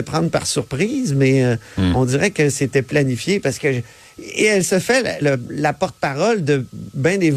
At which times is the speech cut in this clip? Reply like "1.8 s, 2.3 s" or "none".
5.2 s